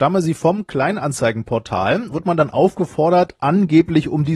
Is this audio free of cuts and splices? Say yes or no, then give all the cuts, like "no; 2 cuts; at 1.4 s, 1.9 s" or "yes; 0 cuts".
no; 1 cut; at 2.1 s